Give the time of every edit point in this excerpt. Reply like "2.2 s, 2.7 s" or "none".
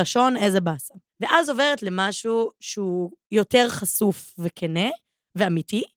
1.1 s, 2.6 s